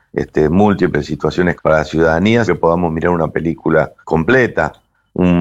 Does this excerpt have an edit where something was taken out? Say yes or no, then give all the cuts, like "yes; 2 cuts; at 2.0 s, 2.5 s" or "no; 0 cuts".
yes; 3 cuts; at 1.6 s, 2.5 s, 4.0 s